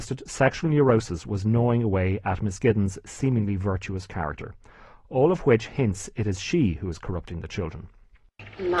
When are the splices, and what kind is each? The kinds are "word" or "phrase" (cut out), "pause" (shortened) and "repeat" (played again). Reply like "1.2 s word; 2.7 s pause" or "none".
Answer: none